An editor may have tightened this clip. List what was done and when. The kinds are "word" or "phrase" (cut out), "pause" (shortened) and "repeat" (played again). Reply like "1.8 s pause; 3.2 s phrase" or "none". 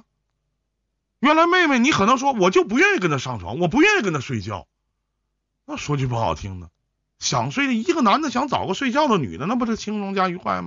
none